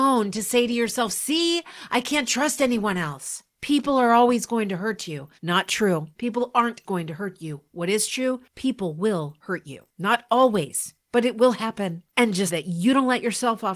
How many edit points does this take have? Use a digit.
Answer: 4